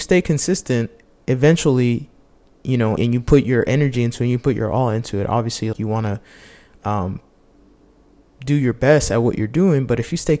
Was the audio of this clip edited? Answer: yes; 2 cuts; at 3.0 s, 5.7 s

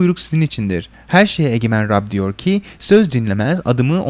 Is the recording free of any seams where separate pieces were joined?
yes; 0 cuts

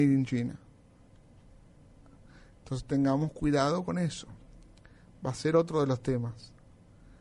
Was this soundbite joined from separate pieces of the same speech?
no; 0 cuts

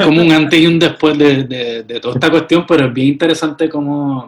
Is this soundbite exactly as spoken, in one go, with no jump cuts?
yes; 0 cuts

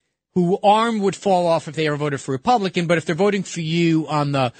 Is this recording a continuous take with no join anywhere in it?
yes; 0 cuts

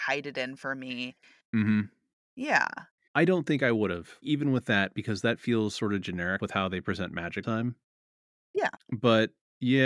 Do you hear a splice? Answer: yes; 3 cuts; at 4.2 s, 6.4 s, 7.4 s

